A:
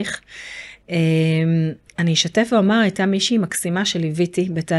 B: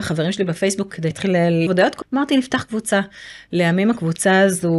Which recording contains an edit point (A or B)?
B